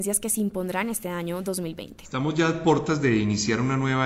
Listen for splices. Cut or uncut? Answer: uncut